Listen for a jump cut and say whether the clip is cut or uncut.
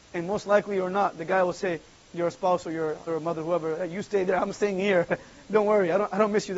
cut